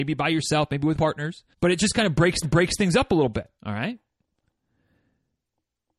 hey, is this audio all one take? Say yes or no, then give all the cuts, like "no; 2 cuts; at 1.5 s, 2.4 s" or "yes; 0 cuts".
no; 4 cuts; at 0.9 s, 1.5 s, 2.4 s, 3.6 s